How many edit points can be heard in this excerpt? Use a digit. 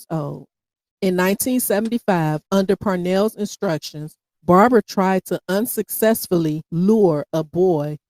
2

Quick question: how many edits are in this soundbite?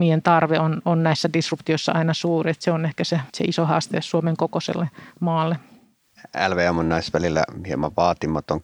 2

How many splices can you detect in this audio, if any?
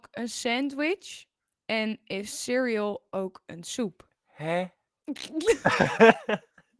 0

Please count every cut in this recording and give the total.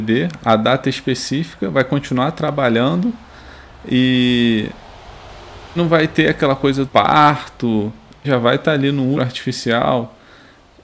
4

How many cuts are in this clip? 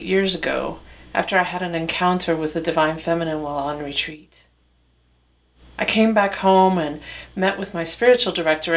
0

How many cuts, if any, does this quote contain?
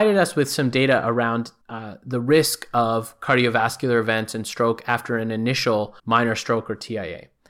2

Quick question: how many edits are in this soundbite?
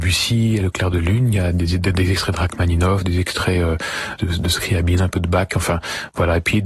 0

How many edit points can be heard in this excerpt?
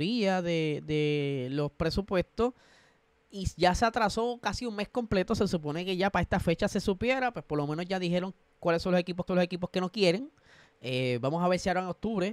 1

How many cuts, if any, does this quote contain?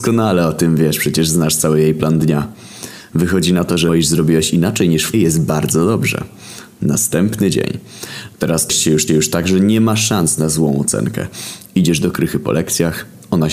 4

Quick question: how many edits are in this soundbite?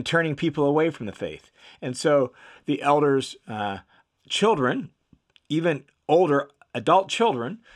0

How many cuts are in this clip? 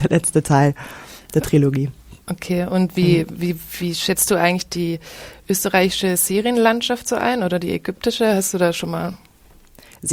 0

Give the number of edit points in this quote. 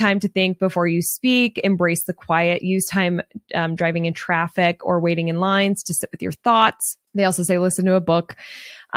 1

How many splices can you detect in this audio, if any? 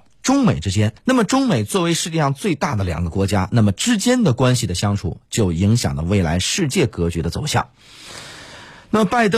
1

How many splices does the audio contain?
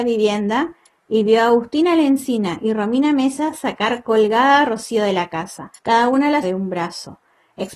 2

